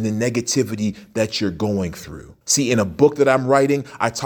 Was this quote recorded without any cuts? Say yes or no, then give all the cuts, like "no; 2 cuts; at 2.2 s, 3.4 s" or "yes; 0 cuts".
no; 1 cut; at 2.4 s